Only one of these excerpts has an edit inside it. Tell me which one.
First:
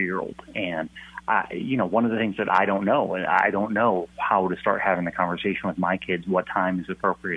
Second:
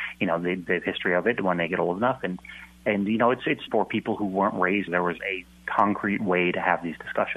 second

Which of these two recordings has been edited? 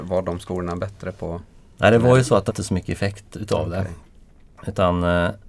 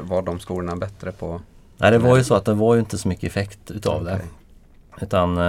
first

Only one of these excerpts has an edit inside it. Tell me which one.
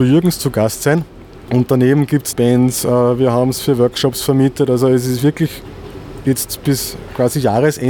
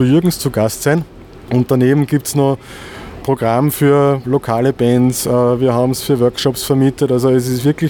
first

